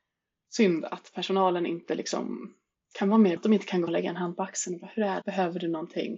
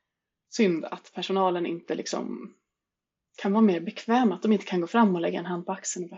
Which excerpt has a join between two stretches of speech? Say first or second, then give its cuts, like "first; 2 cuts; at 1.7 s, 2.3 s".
first; 4 cuts; at 2.7 s, 3.4 s, 3.9 s, 5.2 s